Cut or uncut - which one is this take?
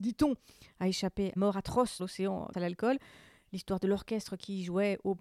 cut